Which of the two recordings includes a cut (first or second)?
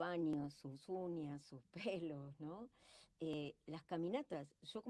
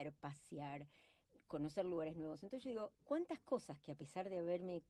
second